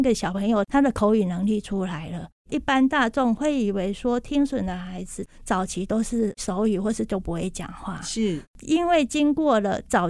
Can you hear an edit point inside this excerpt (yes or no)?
yes